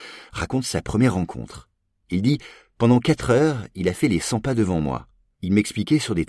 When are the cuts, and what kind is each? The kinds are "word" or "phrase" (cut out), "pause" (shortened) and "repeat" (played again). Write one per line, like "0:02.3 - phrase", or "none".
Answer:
none